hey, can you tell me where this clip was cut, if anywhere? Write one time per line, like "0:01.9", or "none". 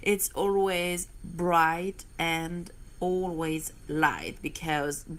none